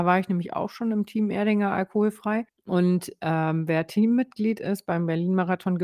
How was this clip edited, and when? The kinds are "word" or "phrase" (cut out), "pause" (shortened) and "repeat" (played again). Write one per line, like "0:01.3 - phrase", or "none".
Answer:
0:02.5 - pause

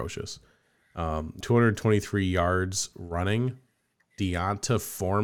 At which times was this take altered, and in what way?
0:01.4 - word
0:04.0 - word

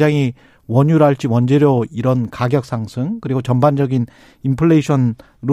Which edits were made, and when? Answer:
none

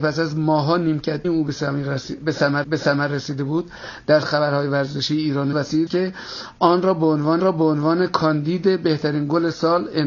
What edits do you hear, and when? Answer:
0:01.2 - word
0:02.6 - repeat
0:04.2 - word
0:05.5 - phrase
0:05.9 - word
0:07.4 - repeat

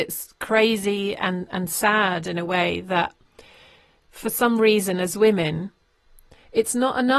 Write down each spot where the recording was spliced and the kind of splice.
none

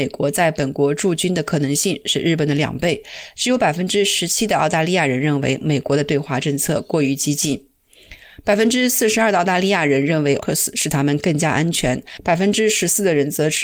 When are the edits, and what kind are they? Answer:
0:10.4 - word

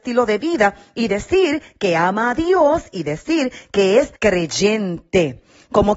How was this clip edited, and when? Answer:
0:04.1 - pause

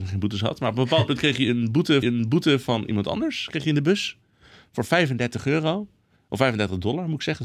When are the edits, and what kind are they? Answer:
0:02.0 - repeat

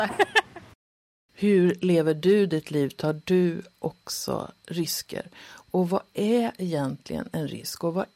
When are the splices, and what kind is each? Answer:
none

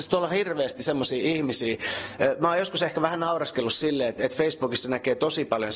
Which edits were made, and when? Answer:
0:04.2 - word

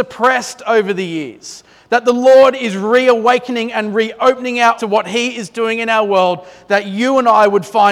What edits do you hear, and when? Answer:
0:04.8 - word

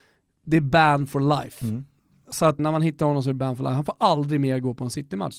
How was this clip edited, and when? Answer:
0:02.6 - word

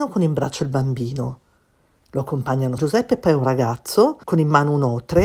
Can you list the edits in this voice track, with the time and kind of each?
0:02.8 - word
0:04.2 - pause

